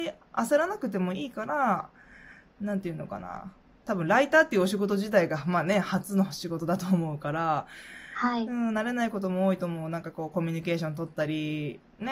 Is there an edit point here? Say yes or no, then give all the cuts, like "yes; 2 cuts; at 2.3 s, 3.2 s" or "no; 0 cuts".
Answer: no; 0 cuts